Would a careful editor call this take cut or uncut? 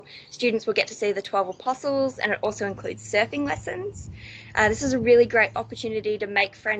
uncut